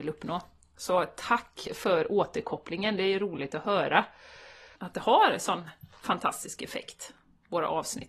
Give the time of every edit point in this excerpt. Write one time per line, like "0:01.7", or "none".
0:04.8